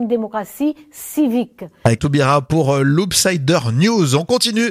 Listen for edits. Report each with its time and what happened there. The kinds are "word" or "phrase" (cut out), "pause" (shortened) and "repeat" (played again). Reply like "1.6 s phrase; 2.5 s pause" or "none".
2.0 s word